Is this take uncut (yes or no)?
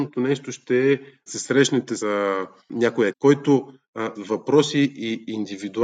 no